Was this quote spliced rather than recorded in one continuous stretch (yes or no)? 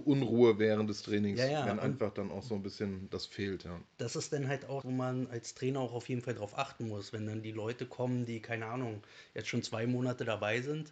yes